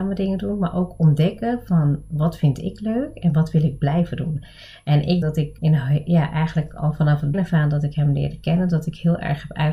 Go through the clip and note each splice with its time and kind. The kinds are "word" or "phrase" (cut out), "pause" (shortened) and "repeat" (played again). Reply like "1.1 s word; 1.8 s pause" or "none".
5.2 s word; 5.6 s word; 7.3 s word